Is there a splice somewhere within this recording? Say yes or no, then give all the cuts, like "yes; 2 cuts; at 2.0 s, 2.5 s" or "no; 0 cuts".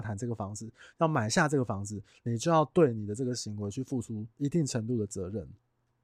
yes; 1 cut; at 4.3 s